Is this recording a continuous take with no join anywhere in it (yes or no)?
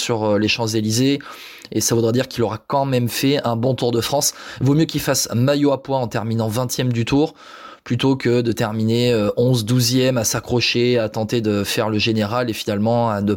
yes